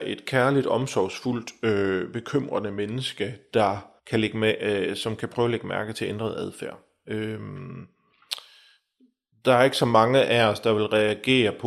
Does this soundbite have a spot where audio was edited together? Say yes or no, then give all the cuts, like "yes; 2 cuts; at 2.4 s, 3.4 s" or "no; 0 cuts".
yes; 1 cut; at 4.0 s